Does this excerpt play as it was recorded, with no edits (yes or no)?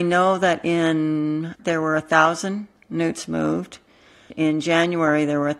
no